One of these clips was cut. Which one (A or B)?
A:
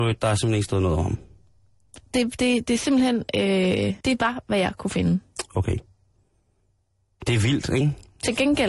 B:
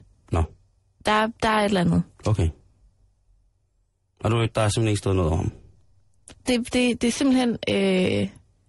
A